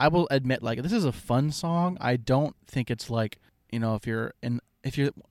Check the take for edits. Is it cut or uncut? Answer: uncut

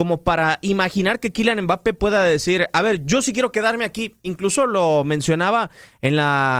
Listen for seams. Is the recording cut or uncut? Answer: uncut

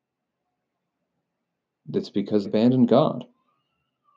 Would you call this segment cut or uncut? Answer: cut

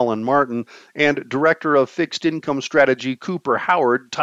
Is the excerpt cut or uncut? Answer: uncut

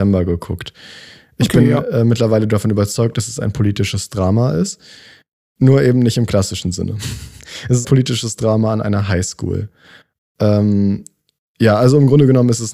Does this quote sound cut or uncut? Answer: cut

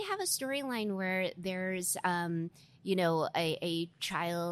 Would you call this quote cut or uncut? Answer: uncut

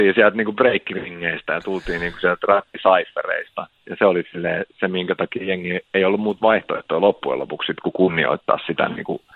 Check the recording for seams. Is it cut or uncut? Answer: cut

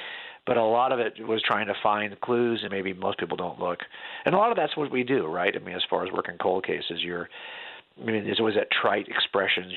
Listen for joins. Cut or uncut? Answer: cut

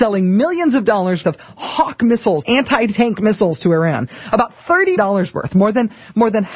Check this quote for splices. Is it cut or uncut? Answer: cut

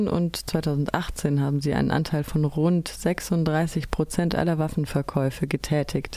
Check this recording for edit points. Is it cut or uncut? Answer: uncut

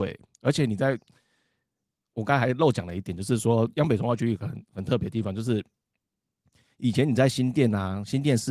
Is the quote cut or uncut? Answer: uncut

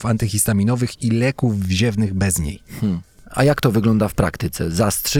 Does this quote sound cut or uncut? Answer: uncut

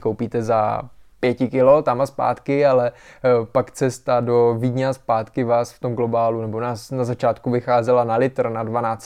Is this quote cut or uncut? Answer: uncut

